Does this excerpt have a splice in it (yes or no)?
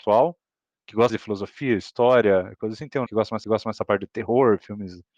yes